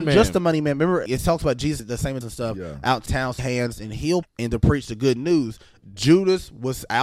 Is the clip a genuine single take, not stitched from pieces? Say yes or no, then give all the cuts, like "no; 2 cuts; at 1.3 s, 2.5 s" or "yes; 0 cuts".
no; 6 cuts; at 1.1 s, 1.8 s, 2.2 s, 3.1 s, 3.4 s, 4.2 s